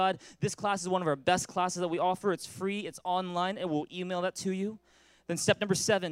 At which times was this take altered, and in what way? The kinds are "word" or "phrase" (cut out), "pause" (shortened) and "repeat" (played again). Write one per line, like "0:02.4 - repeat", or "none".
none